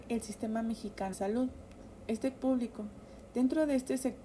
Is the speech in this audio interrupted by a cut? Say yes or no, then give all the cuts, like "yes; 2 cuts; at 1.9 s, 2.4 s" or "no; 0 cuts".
yes; 2 cuts; at 1.1 s, 2.3 s